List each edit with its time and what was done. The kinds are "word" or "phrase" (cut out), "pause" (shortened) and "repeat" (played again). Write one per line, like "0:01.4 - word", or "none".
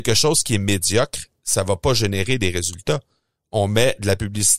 none